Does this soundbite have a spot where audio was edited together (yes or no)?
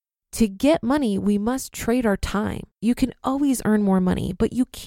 yes